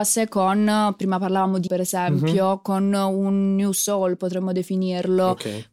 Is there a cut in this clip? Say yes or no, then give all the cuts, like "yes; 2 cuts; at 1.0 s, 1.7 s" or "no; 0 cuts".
yes; 1 cut; at 1.7 s